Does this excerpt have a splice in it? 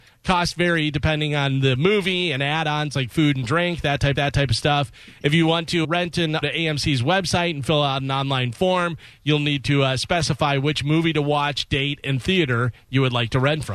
yes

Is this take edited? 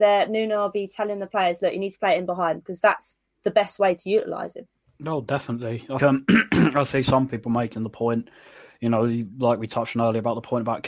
yes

